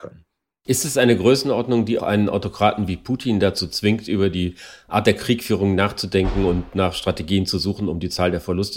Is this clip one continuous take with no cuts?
no; 1 cut; at 2.0 s

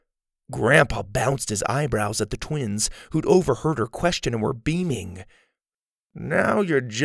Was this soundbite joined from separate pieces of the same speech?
no; 0 cuts

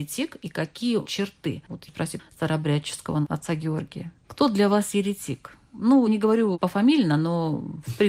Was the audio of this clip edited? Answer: yes; 4 cuts; at 1.1 s, 1.9 s, 2.2 s, 6.1 s

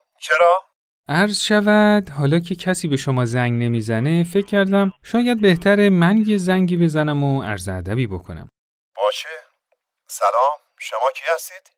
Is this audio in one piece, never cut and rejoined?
yes; 0 cuts

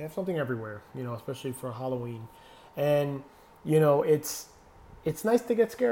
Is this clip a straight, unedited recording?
yes; 0 cuts

